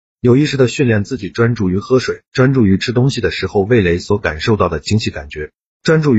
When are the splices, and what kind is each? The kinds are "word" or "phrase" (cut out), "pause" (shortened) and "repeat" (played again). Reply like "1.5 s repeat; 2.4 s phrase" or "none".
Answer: 2.3 s pause